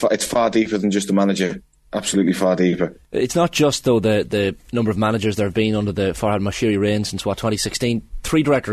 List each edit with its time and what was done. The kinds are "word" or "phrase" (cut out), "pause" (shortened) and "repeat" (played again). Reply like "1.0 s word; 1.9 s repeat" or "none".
none